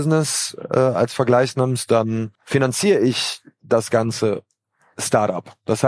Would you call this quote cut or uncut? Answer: cut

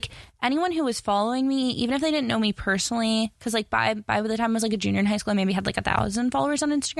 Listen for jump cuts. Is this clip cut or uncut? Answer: uncut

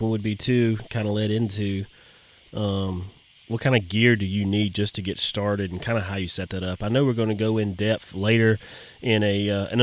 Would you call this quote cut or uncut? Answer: uncut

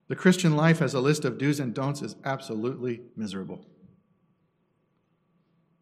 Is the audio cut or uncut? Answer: cut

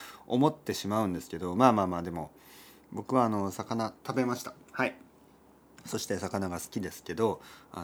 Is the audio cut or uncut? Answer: cut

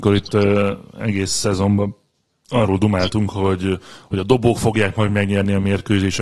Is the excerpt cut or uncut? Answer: uncut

